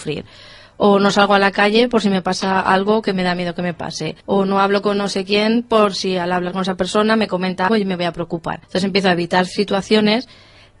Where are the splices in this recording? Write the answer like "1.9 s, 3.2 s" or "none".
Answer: 4.2 s, 7.7 s, 8.6 s

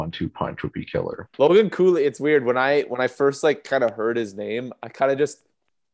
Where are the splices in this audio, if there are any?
1.3 s

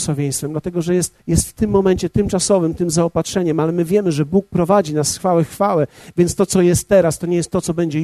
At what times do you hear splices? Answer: 1.2 s

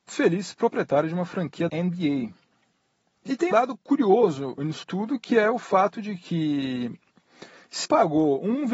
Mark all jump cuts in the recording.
1.7 s, 3.5 s, 4.8 s, 7.8 s

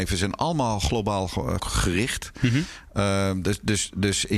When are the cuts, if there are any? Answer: 1.6 s

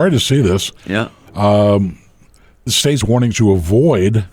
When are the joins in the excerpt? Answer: 2.7 s, 3.0 s, 3.3 s

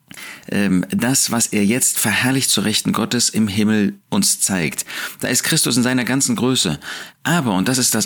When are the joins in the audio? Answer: 4.0 s

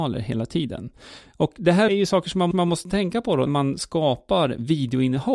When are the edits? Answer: 1.9 s, 2.5 s, 3.5 s

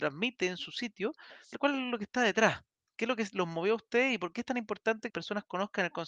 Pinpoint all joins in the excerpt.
1.5 s, 5.1 s

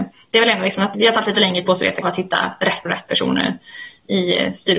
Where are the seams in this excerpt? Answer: 0.9 s, 1.6 s, 2.0 s, 2.9 s

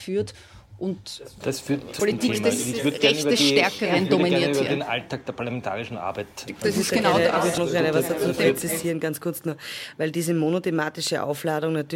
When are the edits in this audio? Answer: 2.0 s, 7.6 s

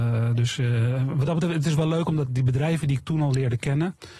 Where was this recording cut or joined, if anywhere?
none

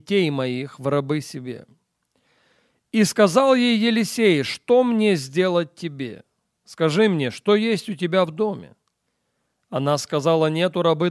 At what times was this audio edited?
none

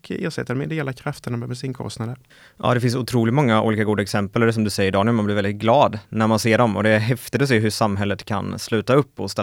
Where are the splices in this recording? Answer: 2.3 s

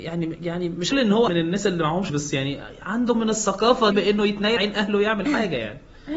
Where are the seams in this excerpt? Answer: 0.9 s, 1.3 s, 2.1 s, 3.1 s, 3.9 s, 4.6 s

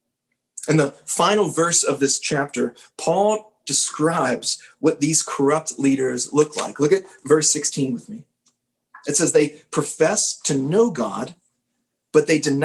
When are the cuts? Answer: none

